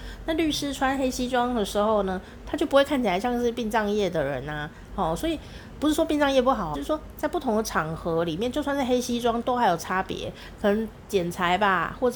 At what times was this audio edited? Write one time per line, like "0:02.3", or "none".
0:06.7